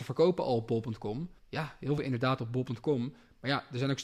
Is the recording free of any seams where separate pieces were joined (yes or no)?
no